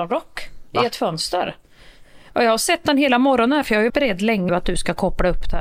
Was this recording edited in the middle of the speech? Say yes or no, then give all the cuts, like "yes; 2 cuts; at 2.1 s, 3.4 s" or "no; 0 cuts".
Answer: yes; 2 cuts; at 3.9 s, 4.5 s